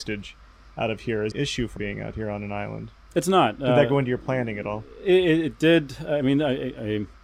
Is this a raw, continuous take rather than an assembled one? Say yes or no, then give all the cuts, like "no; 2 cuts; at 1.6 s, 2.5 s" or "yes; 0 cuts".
no; 2 cuts; at 1.3 s, 1.8 s